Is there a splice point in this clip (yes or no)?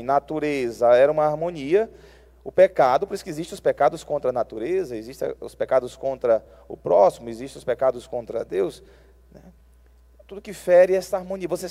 no